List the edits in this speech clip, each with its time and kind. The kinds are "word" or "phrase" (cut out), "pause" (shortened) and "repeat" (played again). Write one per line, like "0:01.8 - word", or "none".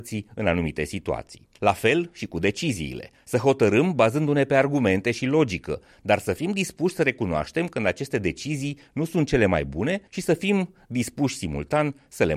0:01.6 - pause
0:10.1 - pause

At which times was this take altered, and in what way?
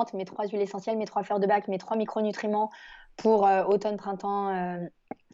none

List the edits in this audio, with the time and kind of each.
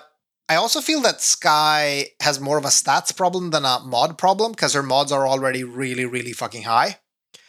none

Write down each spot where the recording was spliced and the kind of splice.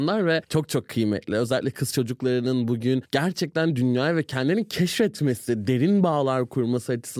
none

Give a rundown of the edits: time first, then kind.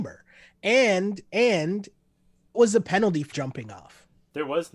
0:02.5 - word
0:03.3 - word

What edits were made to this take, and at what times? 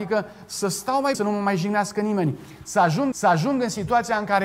0:01.1 - word
0:03.1 - repeat

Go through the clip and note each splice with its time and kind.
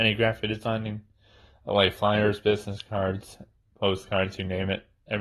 none

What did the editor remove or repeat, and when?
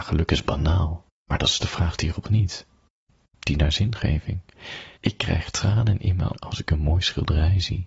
0:01.1 - pause
0:02.2 - word
0:05.0 - pause
0:06.3 - word

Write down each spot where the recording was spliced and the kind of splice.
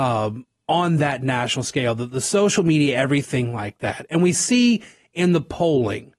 none

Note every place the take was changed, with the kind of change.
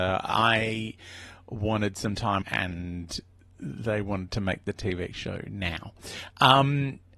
0:02.4 - word

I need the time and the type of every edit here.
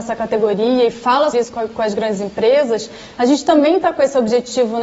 0:01.3 - word

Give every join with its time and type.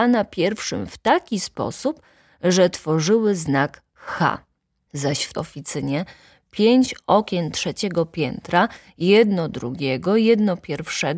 0:05.3 - word

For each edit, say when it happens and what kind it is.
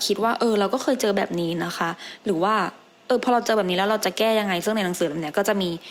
none

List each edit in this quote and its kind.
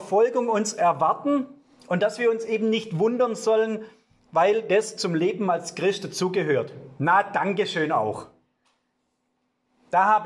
none

